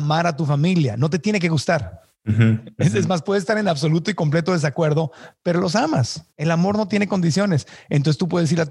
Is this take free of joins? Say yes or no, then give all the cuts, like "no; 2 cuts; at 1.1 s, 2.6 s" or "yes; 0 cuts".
no; 2 cuts; at 2.1 s, 6.3 s